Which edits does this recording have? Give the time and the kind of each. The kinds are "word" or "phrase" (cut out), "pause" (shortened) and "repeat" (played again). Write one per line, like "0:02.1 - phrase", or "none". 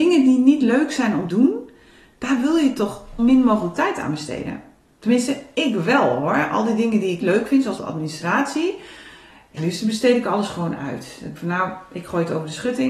0:01.3 - word
0:03.2 - word
0:07.2 - word
0:07.8 - word
0:09.6 - word
0:11.4 - word